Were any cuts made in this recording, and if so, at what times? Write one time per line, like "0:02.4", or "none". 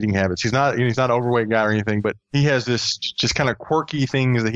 0:02.2

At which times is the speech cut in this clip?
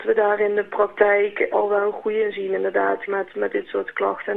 0:01.5
0:03.1

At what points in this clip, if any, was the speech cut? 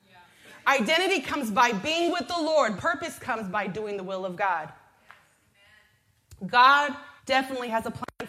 0:02.8
0:07.2

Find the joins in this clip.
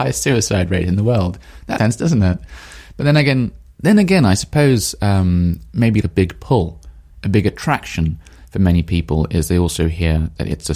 0:01.8
0:06.0

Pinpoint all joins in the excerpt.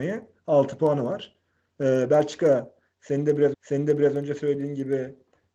0:03.5

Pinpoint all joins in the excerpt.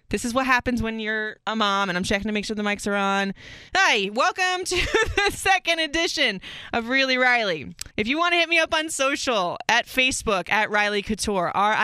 0:01.4
0:03.7
0:07.9

